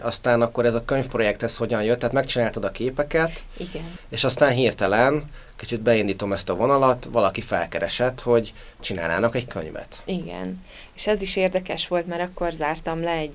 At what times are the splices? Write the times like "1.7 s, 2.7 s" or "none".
none